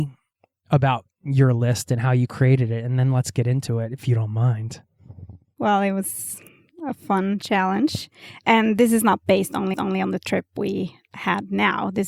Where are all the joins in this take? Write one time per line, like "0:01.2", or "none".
0:09.7